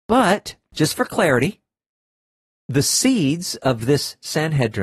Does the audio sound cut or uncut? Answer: uncut